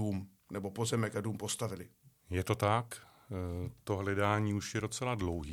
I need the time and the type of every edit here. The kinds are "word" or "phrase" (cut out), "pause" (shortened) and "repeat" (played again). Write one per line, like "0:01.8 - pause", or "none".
none